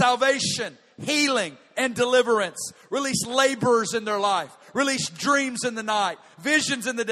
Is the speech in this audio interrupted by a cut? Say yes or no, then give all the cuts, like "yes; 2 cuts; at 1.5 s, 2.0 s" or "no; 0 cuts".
no; 0 cuts